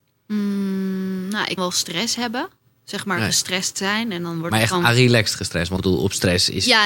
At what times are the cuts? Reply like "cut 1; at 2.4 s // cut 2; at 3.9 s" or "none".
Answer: cut 1; at 1.6 s // cut 2; at 5.8 s